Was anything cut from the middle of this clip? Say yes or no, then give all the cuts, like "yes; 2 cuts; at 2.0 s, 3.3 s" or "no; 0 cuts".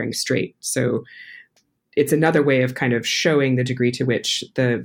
no; 0 cuts